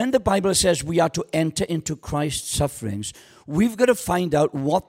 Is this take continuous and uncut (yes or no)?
yes